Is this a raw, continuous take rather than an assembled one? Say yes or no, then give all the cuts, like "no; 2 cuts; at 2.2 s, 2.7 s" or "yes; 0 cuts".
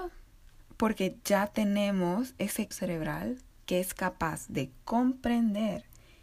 no; 2 cuts; at 2.7 s, 3.5 s